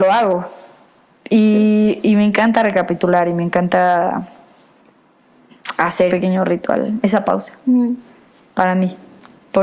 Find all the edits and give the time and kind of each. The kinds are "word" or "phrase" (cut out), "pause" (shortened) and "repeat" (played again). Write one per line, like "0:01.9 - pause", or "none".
0:06.1 - word